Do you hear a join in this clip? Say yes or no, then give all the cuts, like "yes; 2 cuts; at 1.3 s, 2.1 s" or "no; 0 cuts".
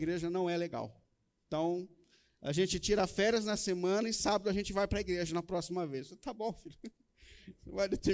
no; 0 cuts